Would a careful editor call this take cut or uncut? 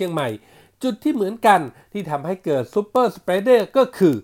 uncut